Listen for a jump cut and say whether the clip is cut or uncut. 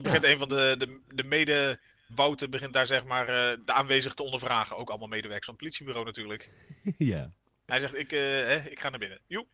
uncut